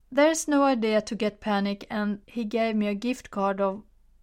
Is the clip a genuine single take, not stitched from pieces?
no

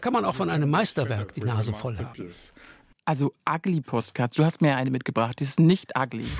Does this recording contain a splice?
no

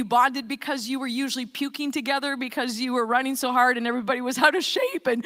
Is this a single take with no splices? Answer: yes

